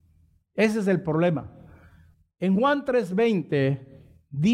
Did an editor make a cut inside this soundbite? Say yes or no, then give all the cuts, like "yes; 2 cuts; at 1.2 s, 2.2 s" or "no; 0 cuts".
yes; 1 cut; at 2.1 s